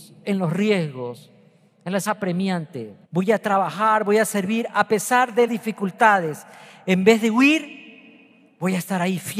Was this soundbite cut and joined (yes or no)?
yes